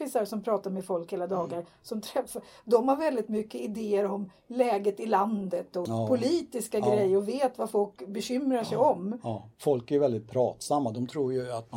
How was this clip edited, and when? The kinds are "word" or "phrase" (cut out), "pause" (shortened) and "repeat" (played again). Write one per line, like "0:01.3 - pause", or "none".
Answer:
0:09.5 - pause

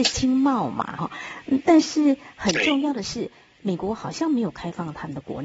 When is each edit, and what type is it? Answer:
0:01.0 - word

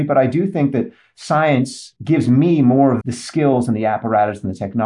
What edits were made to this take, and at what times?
0:02.0 - pause
0:03.0 - word

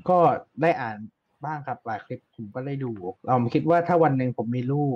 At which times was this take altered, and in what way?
0:03.2 - pause

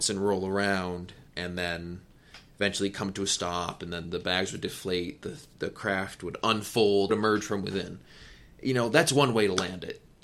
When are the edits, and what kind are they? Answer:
0:01.3 - pause
0:07.1 - phrase

